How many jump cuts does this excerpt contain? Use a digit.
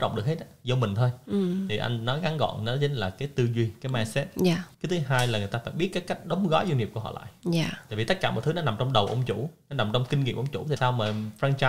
2